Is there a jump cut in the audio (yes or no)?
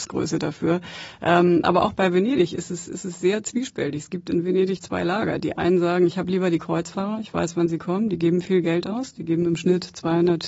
no